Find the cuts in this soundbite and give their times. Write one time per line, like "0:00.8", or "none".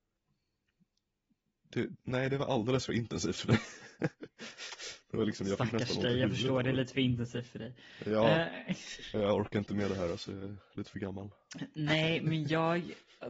none

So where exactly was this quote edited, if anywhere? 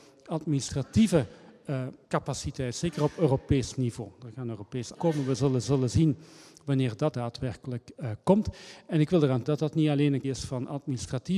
0:02.0
0:04.9
0:05.6
0:07.1
0:09.4
0:10.2

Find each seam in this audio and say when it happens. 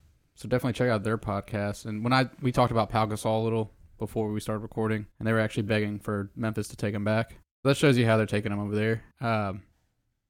0:05.1
0:07.4
0:09.1

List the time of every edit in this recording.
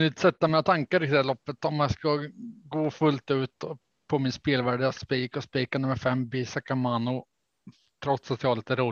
none

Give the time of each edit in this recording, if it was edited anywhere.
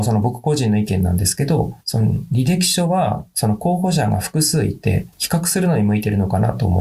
0:01.8
0:05.1

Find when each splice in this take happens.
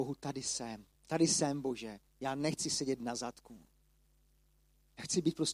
0:00.9
0:02.1

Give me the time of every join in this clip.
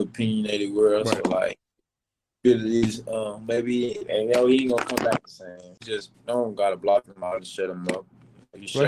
none

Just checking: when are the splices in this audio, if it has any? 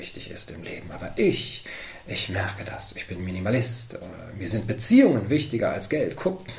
none

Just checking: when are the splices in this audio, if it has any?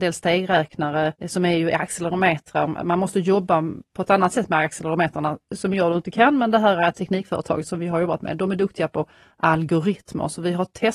0:01.2

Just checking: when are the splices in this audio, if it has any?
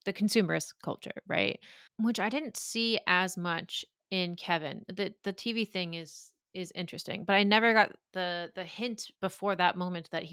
0:01.9
0:09.2

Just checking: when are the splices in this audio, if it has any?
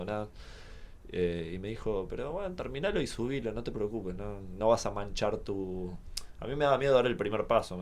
none

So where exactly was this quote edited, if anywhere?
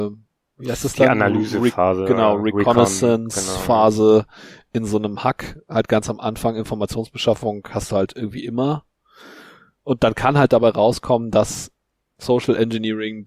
none

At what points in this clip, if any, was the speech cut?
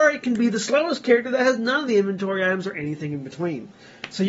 none

